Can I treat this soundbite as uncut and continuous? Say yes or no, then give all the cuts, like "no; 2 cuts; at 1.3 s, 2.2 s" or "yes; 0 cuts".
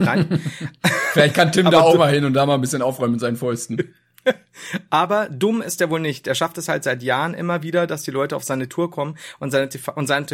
yes; 0 cuts